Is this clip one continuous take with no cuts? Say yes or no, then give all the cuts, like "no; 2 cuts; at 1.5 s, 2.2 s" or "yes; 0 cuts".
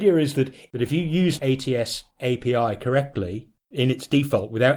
no; 3 cuts; at 1.4 s, 2.1 s, 3.6 s